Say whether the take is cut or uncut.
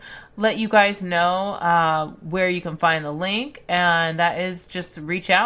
uncut